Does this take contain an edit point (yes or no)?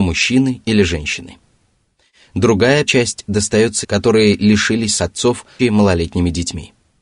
yes